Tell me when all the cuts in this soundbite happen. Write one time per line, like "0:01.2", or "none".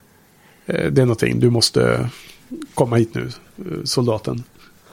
none